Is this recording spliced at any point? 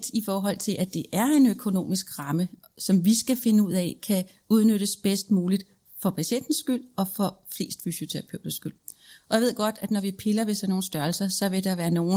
no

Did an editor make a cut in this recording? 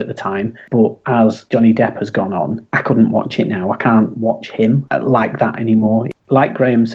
no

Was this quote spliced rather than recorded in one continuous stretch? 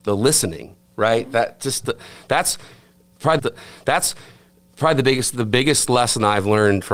yes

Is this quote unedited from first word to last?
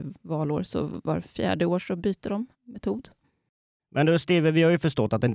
no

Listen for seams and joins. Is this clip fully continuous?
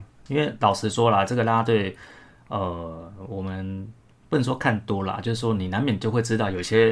yes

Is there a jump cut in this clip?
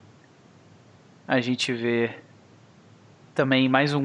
no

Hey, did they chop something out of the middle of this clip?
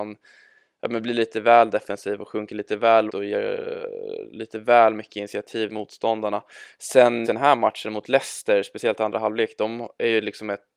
yes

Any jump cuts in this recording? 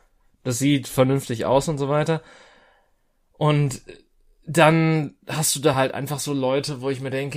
no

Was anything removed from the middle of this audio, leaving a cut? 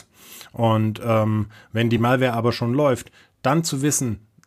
no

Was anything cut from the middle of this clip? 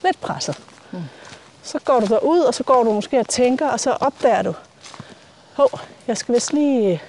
no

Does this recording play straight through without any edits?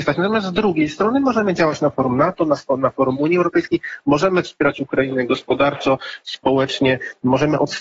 yes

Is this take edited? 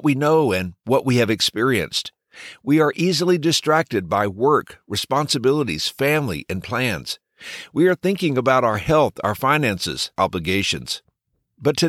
yes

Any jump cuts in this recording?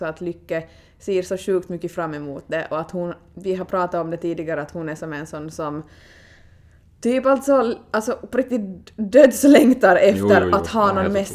no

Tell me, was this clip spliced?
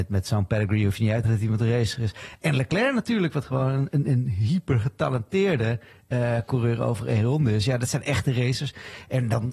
yes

